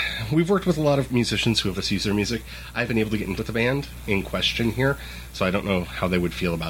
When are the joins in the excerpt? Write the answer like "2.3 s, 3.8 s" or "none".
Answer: 1.1 s, 1.8 s, 2.9 s, 3.4 s, 4.0 s